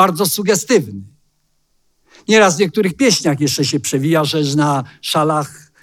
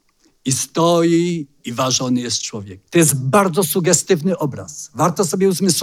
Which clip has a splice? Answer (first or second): second